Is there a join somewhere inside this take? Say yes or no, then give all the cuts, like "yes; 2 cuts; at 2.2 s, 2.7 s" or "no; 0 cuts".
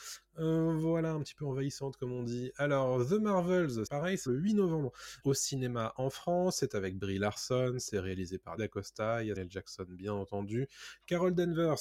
yes; 5 cuts; at 3.9 s, 4.3 s, 5.2 s, 8.6 s, 9.3 s